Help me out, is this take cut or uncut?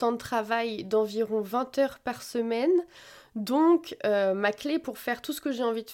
uncut